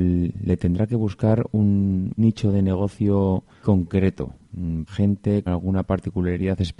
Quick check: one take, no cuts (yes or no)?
no